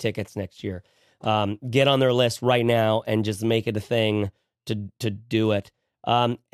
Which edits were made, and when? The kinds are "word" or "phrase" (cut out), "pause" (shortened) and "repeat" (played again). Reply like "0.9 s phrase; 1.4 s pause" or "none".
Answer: none